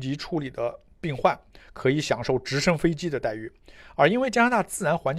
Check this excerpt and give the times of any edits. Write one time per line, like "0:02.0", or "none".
none